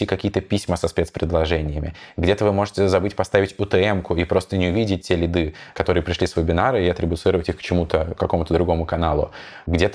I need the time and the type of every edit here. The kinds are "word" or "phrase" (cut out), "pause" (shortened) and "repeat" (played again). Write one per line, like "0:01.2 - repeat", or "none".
none

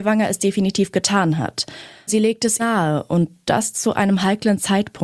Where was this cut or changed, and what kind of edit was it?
0:02.1 - word
0:02.6 - word

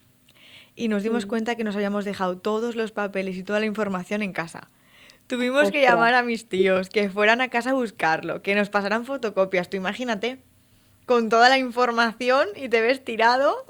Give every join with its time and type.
none

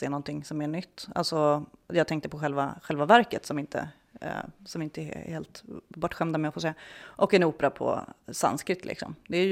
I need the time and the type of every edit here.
none

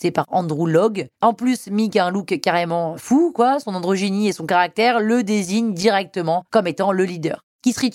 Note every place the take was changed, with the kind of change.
0:01.2 - pause

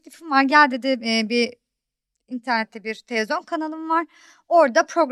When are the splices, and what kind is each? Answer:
0:01.0 - word

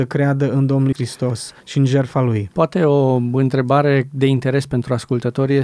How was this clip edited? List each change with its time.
0:00.9 - word
0:01.6 - pause

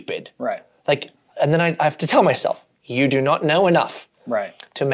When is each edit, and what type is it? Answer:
0:02.8 - pause

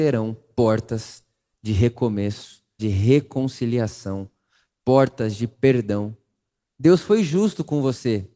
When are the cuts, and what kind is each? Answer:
0:02.8 - word

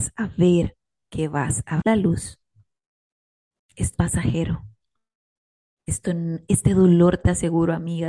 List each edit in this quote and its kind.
0:01.0 - word
0:01.8 - word
0:03.9 - word

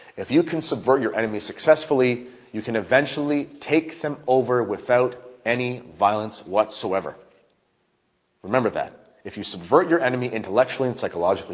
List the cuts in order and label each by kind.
none

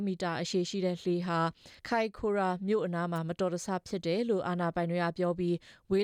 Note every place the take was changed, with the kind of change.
0:01.8 - pause

